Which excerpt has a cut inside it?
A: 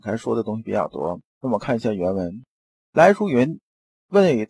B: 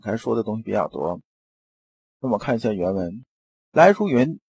A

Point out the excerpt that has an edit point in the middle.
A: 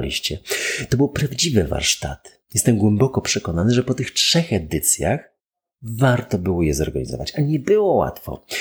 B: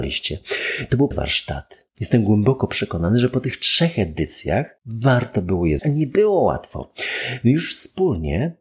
B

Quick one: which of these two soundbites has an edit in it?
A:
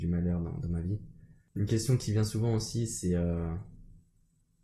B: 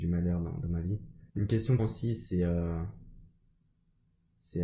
B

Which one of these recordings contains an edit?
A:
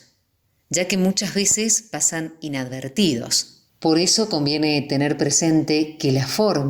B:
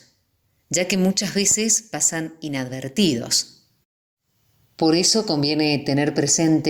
A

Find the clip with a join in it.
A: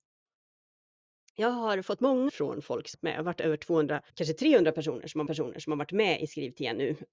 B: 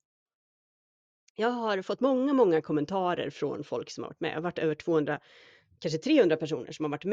A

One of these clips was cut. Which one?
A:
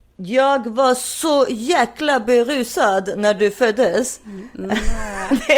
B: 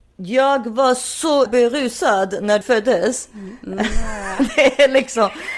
B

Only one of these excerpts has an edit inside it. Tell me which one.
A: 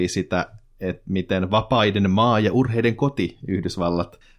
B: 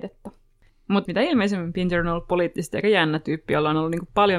B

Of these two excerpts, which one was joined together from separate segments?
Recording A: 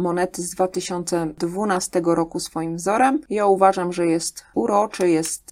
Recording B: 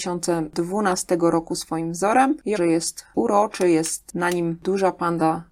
B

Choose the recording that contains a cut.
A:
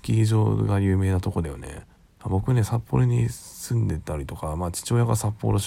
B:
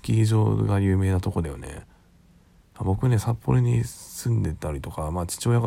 A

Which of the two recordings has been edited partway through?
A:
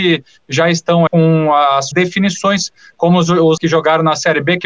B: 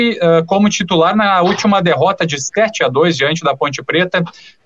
A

